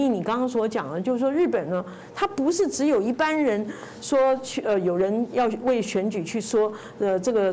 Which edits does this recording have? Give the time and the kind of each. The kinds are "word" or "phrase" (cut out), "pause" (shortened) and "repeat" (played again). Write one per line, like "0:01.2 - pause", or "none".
none